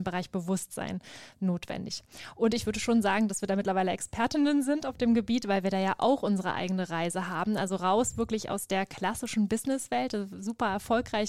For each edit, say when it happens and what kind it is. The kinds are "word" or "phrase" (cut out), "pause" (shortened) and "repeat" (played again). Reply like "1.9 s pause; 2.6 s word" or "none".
none

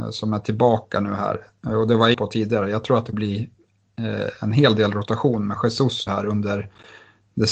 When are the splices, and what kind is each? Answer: 2.1 s word; 3.1 s word; 6.1 s word

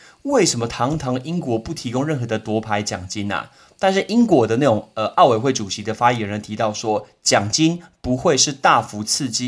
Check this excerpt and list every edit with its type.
none

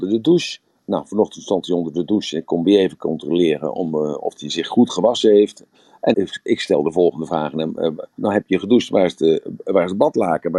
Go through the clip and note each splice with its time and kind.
6.1 s word; 8.2 s word

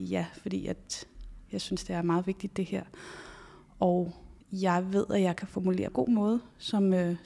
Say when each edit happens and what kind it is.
4.4 s pause; 5.9 s phrase

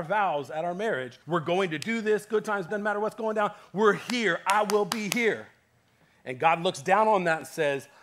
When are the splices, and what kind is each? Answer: 1.2 s pause; 2.7 s word

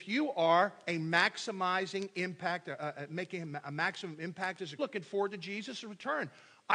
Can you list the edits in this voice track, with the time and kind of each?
4.8 s phrase

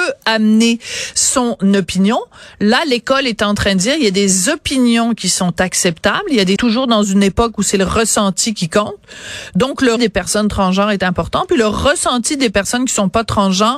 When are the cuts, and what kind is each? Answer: 6.6 s phrase; 10.0 s word

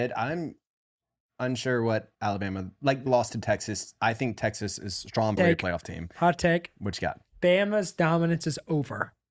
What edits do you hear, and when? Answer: 2.1 s pause; 3.1 s phrase; 5.4 s word

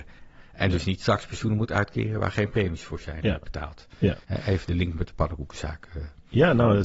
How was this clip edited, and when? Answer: 4.2 s pause

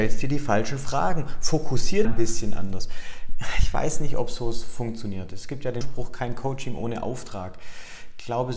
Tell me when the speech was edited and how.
2.0 s phrase; 5.8 s word

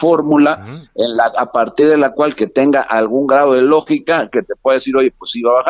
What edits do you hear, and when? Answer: none

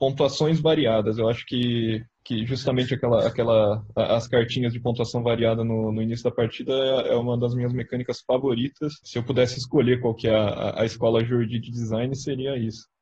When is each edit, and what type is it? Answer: none

